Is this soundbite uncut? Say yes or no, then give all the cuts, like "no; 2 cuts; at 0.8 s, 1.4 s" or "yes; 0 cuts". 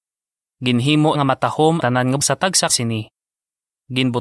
no; 4 cuts; at 1.1 s, 1.8 s, 2.2 s, 2.7 s